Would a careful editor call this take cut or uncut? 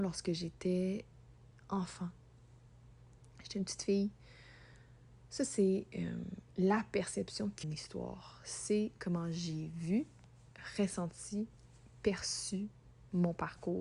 cut